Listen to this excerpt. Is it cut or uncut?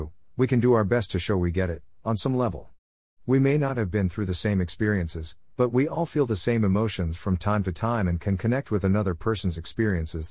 uncut